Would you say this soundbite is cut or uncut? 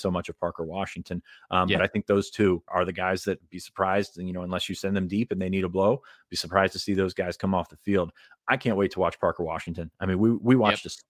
cut